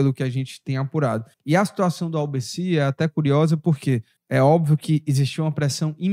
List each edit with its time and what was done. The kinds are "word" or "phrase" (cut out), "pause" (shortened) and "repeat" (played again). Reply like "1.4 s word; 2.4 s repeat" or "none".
1.3 s pause; 4.2 s pause